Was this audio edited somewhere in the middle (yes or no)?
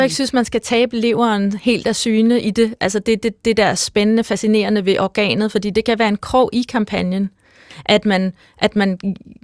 no